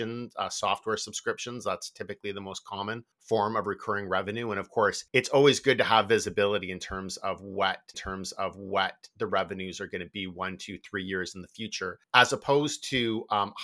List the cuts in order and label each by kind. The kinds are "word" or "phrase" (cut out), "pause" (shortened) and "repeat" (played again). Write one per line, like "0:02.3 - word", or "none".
0:03.1 - pause
0:05.1 - pause
0:07.9 - repeat
0:12.0 - pause